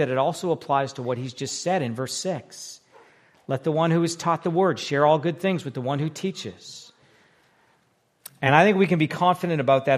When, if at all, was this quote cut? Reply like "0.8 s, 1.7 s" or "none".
none